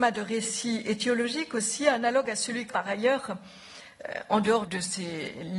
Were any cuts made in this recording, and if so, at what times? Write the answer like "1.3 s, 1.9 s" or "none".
2.7 s, 4.7 s